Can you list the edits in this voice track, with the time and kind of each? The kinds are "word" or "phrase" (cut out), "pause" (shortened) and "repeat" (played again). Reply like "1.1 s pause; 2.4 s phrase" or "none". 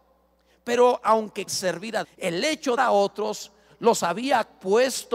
1.5 s word; 2.0 s word; 2.8 s phrase